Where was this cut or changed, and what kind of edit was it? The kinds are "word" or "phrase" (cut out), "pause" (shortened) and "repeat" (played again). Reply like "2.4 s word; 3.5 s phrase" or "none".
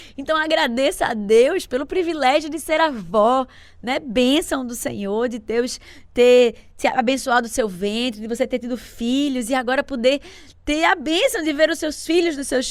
none